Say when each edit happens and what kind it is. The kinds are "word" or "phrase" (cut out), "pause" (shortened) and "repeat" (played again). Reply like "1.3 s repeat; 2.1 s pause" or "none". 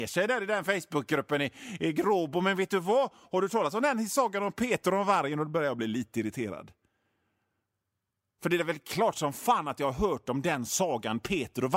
none